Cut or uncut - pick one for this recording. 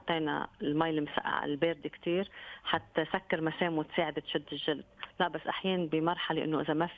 uncut